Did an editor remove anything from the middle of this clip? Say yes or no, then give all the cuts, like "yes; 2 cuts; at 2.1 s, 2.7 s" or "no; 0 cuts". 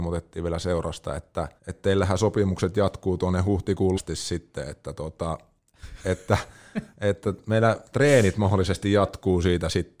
yes; 2 cuts; at 1.6 s, 3.9 s